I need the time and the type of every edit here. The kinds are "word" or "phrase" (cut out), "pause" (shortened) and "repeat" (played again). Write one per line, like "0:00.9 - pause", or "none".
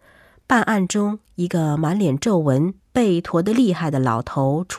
none